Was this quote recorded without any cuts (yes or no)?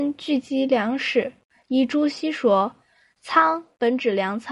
yes